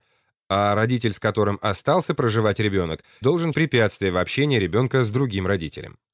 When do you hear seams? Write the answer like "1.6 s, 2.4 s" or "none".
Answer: 3.2 s, 3.5 s